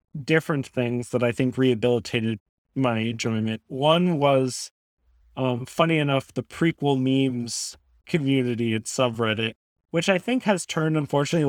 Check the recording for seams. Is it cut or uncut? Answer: uncut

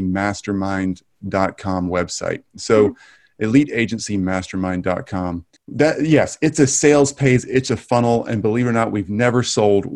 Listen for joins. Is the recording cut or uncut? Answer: cut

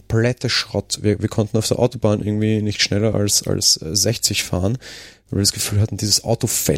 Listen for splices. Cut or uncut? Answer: uncut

